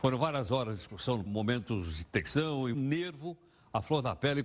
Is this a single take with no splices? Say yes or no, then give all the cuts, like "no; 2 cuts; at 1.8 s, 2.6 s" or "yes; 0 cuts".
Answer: no; 2 cuts; at 1.3 s, 2.7 s